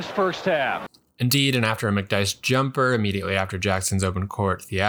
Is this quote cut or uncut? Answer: uncut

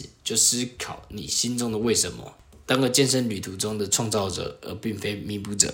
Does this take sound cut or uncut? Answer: uncut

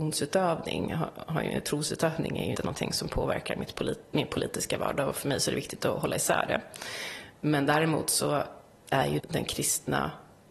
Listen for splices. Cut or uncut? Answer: cut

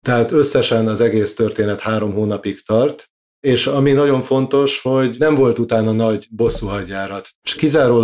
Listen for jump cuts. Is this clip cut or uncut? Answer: uncut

